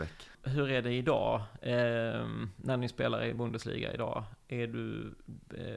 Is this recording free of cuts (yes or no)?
yes